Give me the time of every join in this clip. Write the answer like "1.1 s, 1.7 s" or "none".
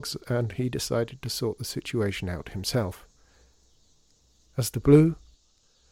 none